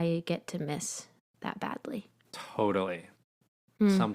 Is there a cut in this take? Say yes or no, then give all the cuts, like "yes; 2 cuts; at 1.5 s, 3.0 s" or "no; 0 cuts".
no; 0 cuts